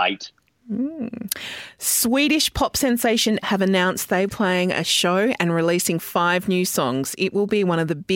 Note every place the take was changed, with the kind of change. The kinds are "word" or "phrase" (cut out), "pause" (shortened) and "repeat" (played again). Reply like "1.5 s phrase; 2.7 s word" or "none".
3.4 s word; 4.3 s phrase